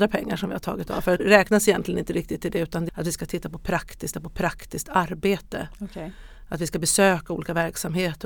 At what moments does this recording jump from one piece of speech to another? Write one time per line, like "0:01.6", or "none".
0:01.2
0:02.9
0:04.1